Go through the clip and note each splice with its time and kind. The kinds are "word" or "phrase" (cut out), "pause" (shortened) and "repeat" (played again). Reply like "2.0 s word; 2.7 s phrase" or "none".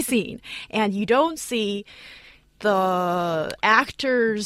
none